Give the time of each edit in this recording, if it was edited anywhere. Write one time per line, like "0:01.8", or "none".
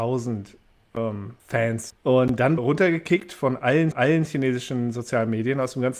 0:01.4
0:02.6
0:03.9